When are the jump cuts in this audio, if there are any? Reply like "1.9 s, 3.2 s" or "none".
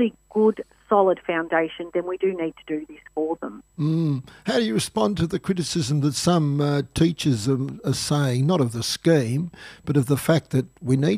3.7 s